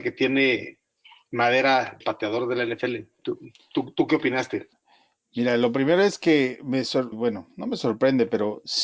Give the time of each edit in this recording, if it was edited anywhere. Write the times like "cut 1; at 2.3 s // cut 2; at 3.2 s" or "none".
cut 1; at 2.0 s // cut 2; at 7.1 s